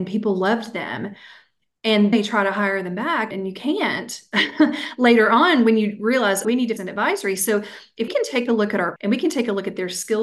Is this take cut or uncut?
cut